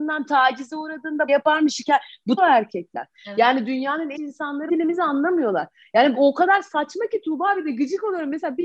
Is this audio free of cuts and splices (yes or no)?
no